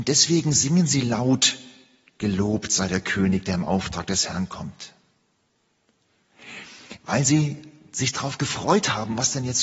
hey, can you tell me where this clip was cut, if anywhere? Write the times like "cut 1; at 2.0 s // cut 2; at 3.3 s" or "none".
none